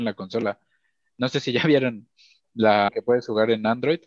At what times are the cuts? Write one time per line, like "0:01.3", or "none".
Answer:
0:02.9